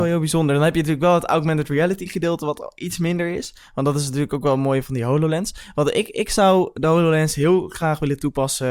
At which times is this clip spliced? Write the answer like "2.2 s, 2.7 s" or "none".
none